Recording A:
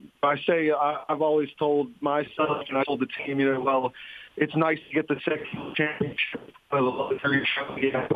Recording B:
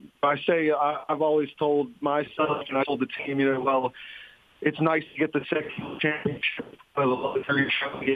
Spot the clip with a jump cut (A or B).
A